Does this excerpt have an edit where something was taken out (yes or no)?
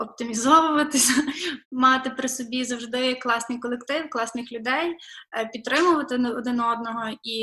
yes